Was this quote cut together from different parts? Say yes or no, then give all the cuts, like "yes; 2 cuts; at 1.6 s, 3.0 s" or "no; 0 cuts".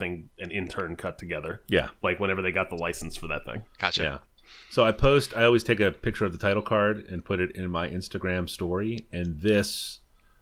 no; 0 cuts